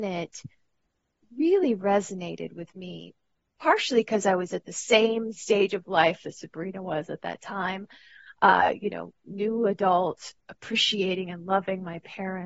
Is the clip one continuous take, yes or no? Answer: yes